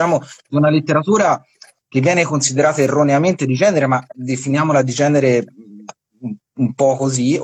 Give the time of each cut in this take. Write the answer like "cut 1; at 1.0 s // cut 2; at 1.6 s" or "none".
none